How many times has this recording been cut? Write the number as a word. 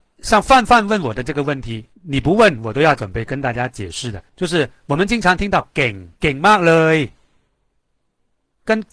three